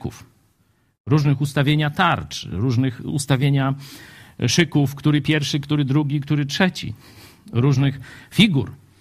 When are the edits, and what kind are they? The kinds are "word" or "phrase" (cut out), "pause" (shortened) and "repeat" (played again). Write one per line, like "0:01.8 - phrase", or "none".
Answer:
none